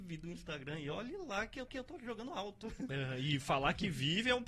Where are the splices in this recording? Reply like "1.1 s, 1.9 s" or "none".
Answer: 1.7 s